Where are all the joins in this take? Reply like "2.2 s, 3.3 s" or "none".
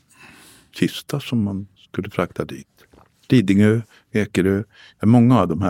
none

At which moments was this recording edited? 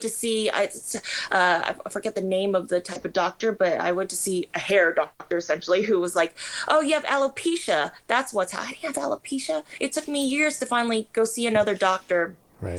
none

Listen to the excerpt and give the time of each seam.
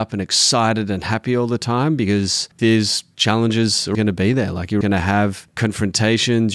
2.6 s, 3.9 s, 4.8 s

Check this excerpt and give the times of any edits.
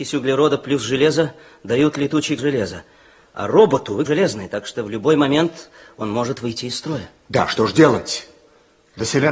2.4 s, 4.1 s

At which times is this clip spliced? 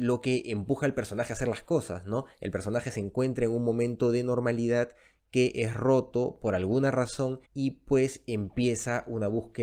7.5 s

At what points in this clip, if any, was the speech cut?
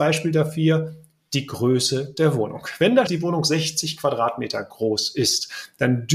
3.1 s

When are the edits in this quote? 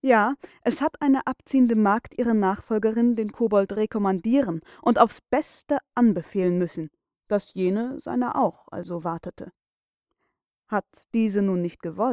none

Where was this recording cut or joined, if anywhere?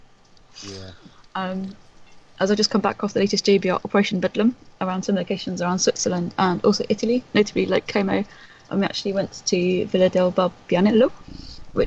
none

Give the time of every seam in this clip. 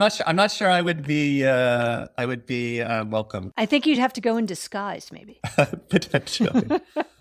none

